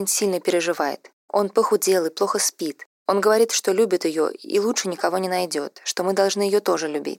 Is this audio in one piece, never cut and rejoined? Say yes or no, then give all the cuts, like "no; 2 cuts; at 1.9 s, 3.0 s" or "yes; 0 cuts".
no; 2 cuts; at 1.2 s, 2.9 s